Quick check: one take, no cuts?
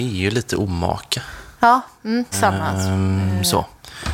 no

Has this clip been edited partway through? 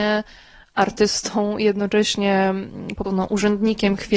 yes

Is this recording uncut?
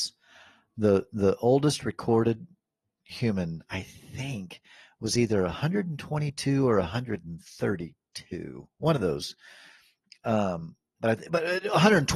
yes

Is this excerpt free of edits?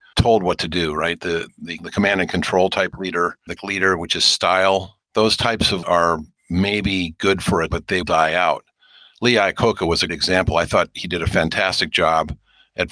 no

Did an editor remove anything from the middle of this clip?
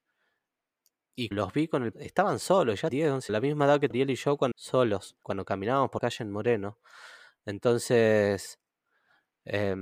yes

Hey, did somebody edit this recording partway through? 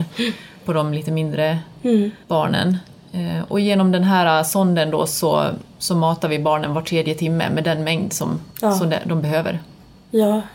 yes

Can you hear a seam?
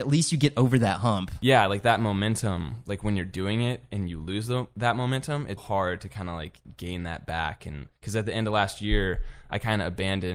yes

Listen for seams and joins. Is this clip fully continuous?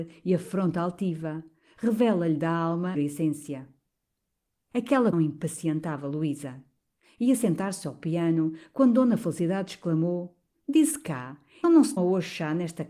no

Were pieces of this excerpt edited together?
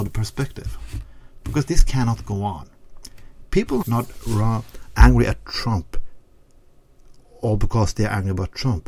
yes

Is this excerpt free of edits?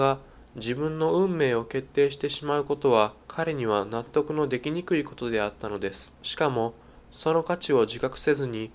no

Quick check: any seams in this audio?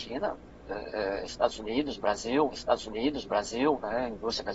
yes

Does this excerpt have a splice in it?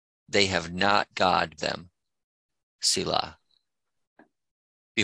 yes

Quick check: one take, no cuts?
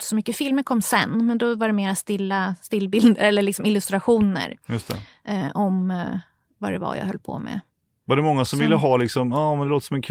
yes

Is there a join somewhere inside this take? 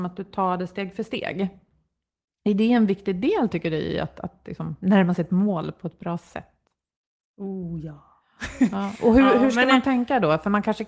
no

